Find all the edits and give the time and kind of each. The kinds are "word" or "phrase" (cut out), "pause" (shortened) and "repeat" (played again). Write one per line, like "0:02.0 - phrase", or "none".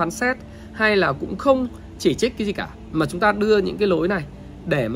none